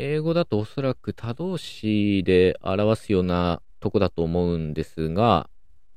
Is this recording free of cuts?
yes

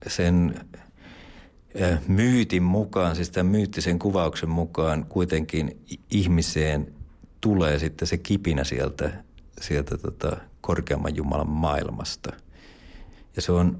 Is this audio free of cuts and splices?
yes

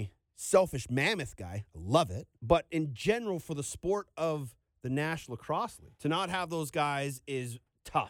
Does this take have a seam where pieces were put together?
yes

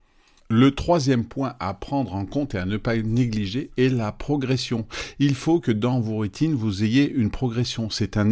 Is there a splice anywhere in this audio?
no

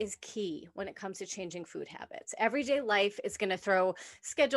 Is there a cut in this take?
no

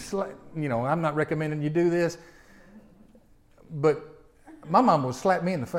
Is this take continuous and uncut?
yes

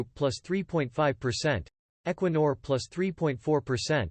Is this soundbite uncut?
yes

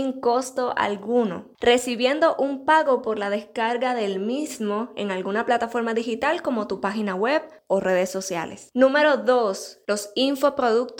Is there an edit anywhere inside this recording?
no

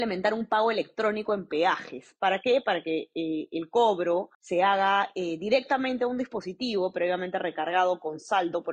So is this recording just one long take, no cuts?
no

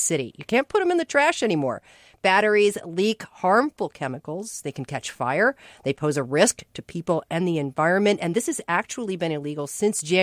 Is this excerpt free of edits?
yes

